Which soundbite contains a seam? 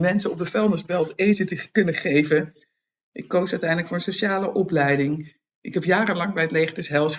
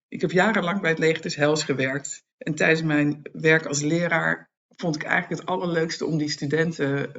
second; 2 cuts; at 2.3 s, 4.6 s

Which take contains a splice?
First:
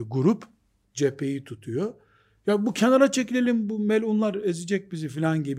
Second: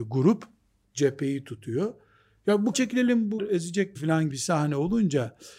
second; 4 cuts; at 2.7 s, 3.4 s, 3.9 s, 4.3 s

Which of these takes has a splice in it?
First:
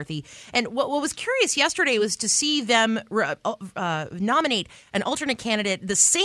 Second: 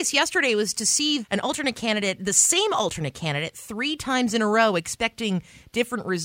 second; 1 cut; at 1.2 s

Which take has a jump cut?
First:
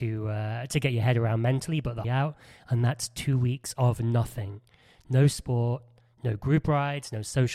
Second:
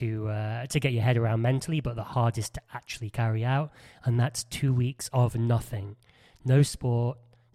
first; 1 cut; at 2.0 s

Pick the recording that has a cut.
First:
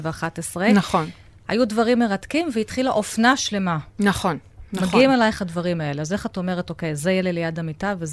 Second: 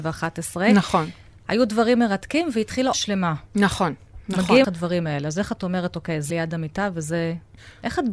second; 3 cuts; at 2.9 s, 4.6 s, 6.3 s

